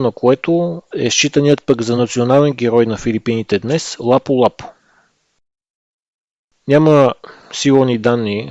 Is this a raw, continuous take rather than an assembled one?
yes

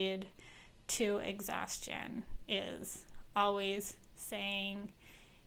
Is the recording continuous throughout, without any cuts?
yes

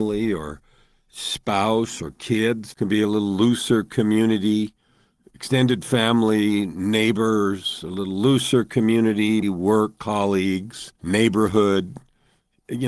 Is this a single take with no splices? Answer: no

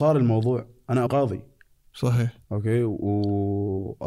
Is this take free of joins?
no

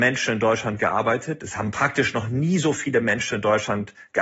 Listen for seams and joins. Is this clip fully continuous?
yes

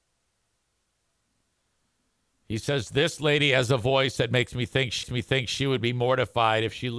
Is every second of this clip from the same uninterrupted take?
no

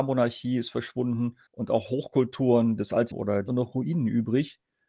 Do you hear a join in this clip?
yes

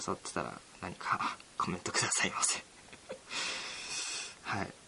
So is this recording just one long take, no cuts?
no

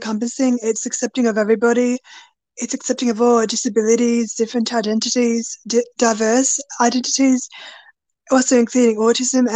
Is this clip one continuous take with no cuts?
yes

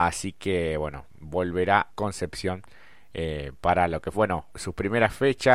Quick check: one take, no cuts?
no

